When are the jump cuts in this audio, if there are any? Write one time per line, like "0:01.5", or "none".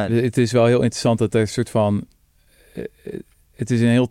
none